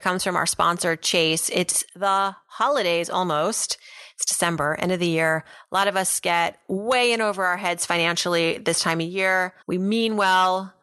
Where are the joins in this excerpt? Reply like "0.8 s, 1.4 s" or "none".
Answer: 9.6 s